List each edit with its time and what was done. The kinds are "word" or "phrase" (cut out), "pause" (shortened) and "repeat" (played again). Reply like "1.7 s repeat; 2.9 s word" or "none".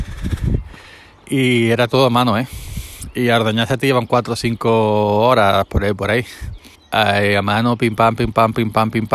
6.7 s pause